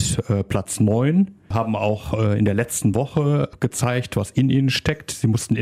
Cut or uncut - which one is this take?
uncut